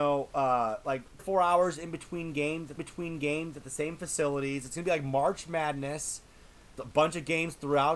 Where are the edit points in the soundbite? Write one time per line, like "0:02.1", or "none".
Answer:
0:01.2
0:02.8
0:06.8